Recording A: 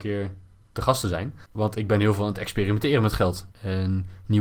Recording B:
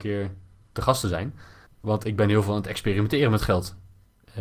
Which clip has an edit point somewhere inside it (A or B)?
A